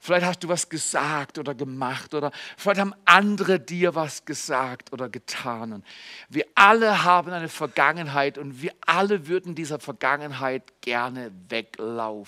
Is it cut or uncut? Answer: cut